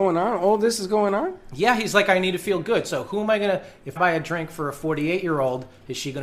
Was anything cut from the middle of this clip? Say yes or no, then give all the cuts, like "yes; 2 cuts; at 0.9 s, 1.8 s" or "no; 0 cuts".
yes; 1 cut; at 4.0 s